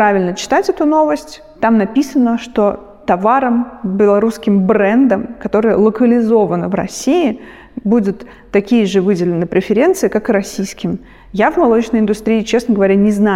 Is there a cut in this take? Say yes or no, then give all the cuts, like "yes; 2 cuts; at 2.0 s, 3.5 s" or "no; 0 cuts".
no; 0 cuts